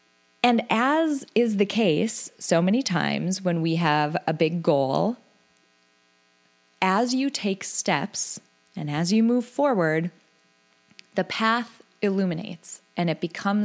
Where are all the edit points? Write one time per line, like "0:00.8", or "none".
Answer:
none